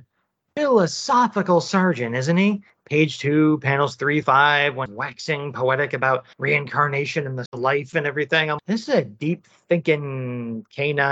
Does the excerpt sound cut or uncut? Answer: cut